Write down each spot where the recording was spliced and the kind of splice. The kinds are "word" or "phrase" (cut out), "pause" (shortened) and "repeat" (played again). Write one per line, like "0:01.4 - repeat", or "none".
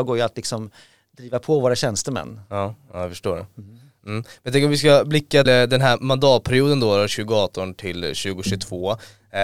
0:05.5 - word